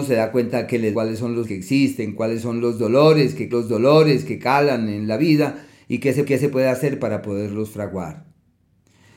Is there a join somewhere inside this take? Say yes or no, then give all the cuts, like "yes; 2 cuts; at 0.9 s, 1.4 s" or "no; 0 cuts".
yes; 4 cuts; at 0.9 s, 1.4 s, 3.5 s, 6.3 s